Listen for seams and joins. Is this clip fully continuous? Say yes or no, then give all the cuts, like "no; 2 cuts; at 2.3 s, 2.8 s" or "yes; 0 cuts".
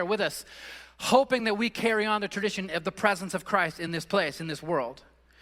yes; 0 cuts